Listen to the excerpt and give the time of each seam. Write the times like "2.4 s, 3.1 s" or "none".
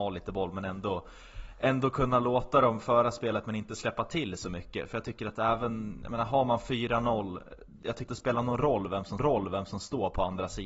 8.1 s, 9.2 s